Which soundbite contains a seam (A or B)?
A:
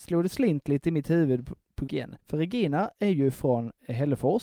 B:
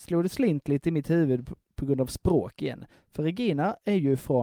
A